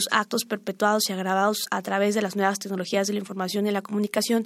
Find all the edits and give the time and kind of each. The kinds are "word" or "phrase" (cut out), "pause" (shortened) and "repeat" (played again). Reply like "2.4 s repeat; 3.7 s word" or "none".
none